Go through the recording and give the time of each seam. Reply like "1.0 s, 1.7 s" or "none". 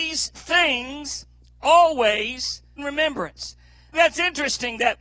2.8 s, 3.9 s